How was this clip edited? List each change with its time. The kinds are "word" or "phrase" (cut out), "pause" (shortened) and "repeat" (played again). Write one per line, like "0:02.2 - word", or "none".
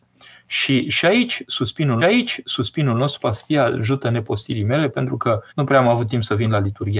0:02.0 - repeat
0:05.5 - pause